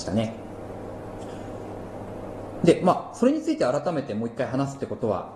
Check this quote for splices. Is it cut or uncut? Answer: uncut